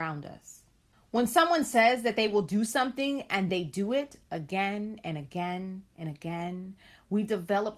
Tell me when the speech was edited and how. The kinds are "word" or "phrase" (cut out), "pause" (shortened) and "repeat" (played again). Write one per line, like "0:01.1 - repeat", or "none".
0:00.9 - pause
0:03.5 - word